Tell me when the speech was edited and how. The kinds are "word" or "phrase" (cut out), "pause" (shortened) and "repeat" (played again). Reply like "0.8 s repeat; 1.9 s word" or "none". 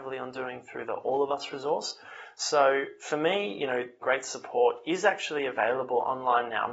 4.0 s phrase